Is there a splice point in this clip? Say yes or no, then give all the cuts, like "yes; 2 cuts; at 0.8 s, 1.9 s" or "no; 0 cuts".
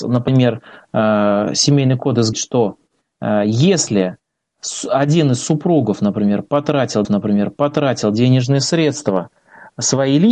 yes; 2 cuts; at 2.3 s, 7.0 s